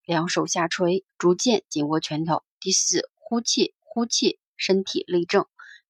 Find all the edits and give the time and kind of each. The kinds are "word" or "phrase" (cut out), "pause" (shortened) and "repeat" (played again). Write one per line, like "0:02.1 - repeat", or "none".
0:01.1 - pause
0:03.8 - repeat